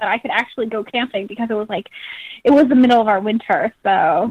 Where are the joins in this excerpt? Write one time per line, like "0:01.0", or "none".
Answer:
none

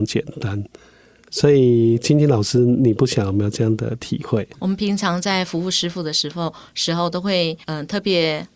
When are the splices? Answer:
0:04.5
0:07.6

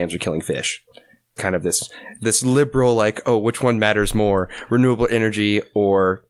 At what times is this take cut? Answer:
0:01.4

